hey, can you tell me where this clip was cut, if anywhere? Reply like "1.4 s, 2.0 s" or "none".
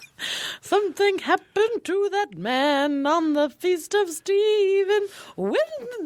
none